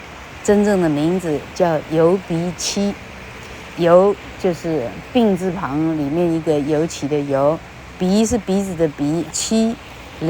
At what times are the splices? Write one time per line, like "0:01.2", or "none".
0:09.3